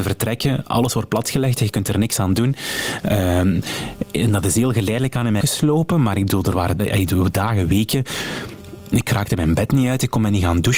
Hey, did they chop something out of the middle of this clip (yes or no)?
yes